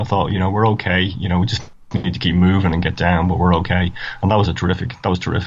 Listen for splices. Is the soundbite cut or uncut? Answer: uncut